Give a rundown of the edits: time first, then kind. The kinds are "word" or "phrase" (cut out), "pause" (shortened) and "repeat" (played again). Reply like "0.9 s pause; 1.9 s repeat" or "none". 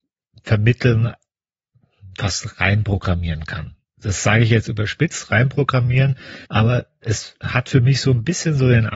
3.8 s pause; 6.4 s pause